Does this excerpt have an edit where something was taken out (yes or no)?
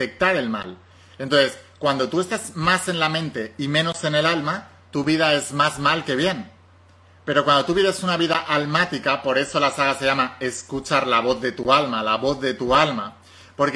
no